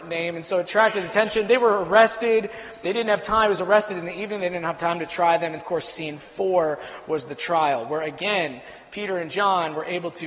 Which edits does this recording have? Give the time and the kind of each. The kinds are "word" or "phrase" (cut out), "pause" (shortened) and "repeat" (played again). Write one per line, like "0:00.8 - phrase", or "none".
0:05.6 - word